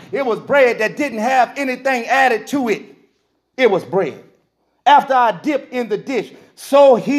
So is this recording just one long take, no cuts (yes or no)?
yes